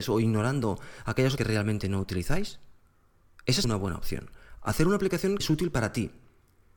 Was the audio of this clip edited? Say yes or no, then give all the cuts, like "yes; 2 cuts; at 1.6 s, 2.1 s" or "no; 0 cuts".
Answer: yes; 3 cuts; at 1.4 s, 3.6 s, 5.4 s